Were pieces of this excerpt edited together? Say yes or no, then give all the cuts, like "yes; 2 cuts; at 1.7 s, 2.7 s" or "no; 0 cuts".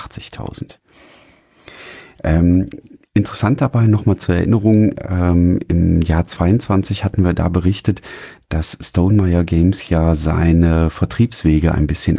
no; 0 cuts